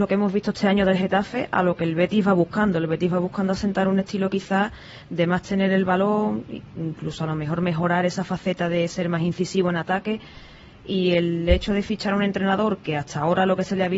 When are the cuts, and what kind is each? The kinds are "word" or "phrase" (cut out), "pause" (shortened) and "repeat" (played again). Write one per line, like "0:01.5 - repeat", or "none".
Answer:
none